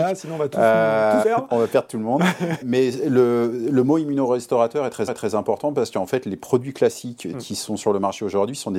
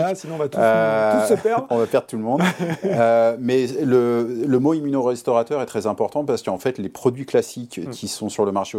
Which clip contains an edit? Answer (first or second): first